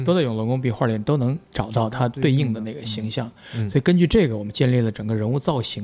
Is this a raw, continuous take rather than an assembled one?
no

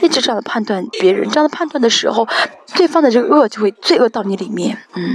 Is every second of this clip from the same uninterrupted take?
no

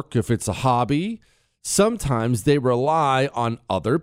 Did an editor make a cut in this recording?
no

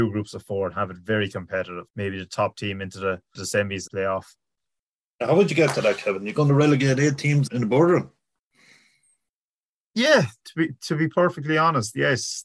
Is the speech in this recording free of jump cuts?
no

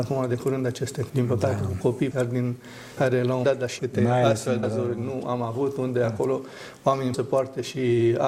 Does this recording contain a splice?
yes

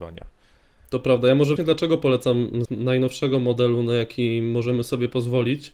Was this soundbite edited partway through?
yes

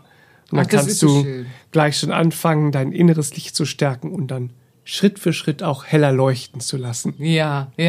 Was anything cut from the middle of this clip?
no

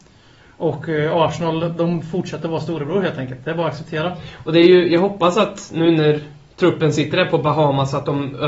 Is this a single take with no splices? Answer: yes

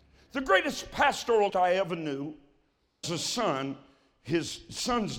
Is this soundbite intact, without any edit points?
no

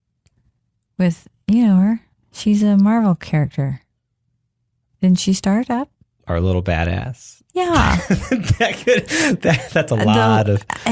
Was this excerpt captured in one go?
yes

